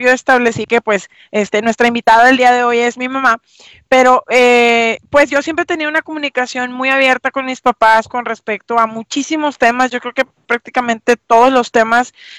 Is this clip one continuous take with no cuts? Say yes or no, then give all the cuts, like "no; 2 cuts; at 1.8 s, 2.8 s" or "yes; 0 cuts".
yes; 0 cuts